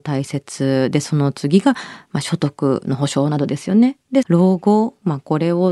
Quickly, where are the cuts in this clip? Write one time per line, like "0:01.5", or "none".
0:04.2